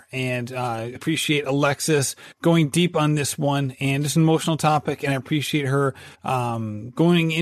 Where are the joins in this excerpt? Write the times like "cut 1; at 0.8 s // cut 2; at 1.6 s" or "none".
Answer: cut 1; at 1.0 s // cut 2; at 2.3 s // cut 3; at 6.1 s

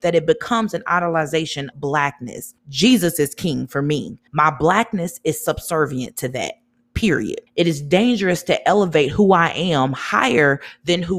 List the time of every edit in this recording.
cut 1; at 1.7 s // cut 2; at 2.6 s // cut 3; at 4.3 s // cut 4; at 7.5 s

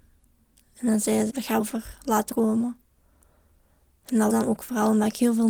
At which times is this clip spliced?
cut 1; at 1.3 s // cut 2; at 1.6 s // cut 3; at 2.3 s // cut 4; at 4.3 s

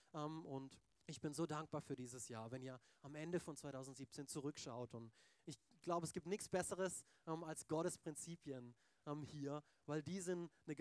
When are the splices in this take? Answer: cut 1; at 0.9 s

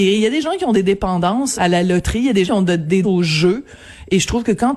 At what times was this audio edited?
cut 1; at 1.5 s // cut 2; at 2.4 s // cut 3; at 3.0 s

